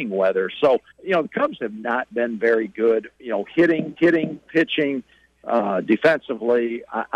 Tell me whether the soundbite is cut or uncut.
cut